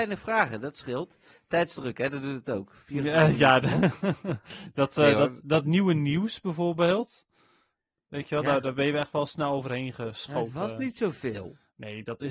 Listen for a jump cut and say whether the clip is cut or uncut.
uncut